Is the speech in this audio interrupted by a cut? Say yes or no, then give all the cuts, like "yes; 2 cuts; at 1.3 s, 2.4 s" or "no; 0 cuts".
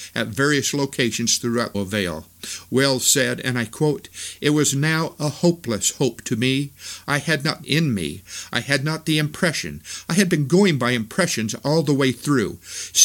yes; 2 cuts; at 1.7 s, 7.6 s